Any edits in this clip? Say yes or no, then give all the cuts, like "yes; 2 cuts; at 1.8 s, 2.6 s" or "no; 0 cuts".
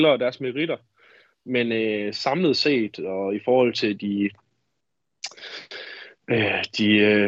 no; 0 cuts